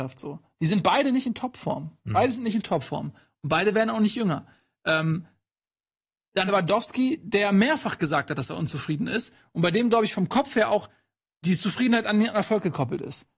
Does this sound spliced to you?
yes; 1 cut; at 6.5 s

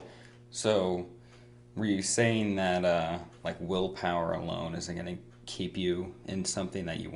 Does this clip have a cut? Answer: no; 0 cuts

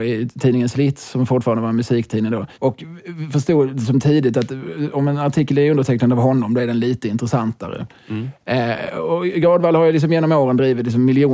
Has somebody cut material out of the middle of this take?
yes; 1 cut; at 2.5 s

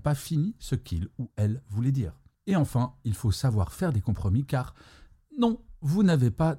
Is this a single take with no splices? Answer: yes; 0 cuts

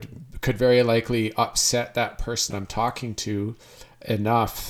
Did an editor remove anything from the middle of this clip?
yes; 1 cut; at 2.5 s

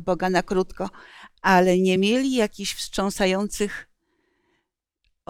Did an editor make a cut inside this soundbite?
no; 0 cuts

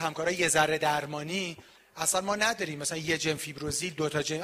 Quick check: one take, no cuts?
yes; 0 cuts

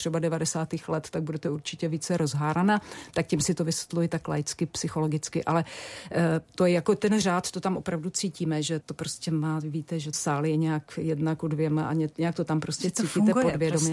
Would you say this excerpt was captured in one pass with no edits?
no; 2 cuts; at 8.8 s, 10.1 s

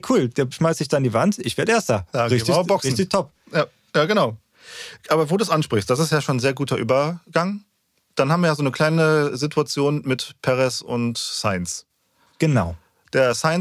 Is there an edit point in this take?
no; 0 cuts

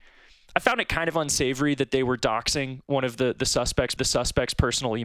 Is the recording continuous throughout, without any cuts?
no; 1 cut; at 4.0 s

